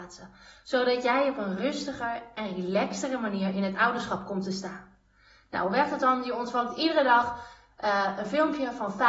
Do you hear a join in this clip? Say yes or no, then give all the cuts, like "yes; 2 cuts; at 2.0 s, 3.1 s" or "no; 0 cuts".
no; 0 cuts